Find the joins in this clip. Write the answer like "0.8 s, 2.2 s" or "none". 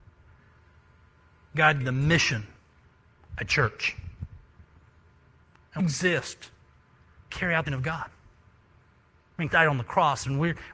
1.8 s, 5.8 s, 7.3 s, 7.7 s, 9.5 s